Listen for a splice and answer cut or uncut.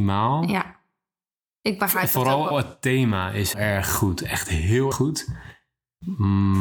cut